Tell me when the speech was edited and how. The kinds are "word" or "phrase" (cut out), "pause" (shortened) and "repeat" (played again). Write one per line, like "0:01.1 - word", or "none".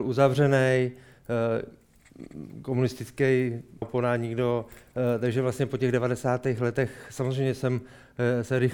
0:03.8 - word